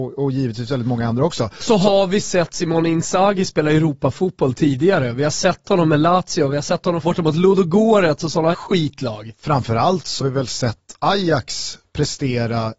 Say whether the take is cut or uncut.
cut